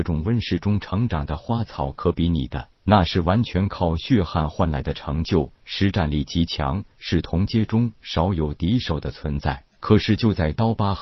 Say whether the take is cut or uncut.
cut